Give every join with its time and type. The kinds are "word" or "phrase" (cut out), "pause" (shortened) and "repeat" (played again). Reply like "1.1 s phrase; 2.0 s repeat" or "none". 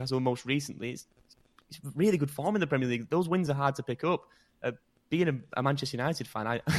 none